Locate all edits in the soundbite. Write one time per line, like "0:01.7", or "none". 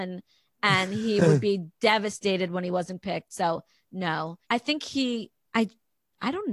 0:04.4
0:05.5